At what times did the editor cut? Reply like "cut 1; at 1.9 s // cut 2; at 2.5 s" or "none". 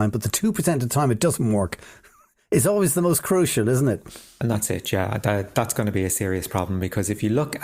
none